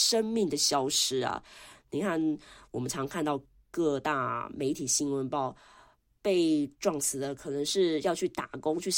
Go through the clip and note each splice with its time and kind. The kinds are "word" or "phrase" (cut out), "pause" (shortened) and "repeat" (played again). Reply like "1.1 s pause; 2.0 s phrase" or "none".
none